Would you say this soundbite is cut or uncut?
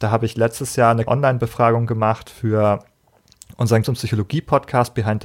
cut